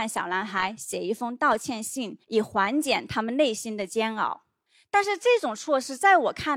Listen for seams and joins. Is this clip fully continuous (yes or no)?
no